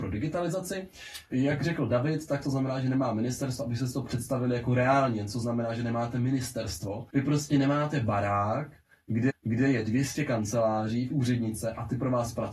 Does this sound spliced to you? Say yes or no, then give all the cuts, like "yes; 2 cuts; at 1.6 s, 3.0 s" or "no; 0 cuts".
yes; 3 cuts; at 7.1 s, 9.3 s, 11.1 s